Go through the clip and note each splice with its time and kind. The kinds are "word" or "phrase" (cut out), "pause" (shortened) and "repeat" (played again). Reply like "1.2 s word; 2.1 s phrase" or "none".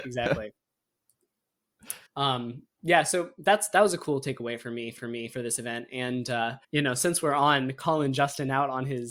2.1 s pause; 5.0 s repeat; 6.6 s pause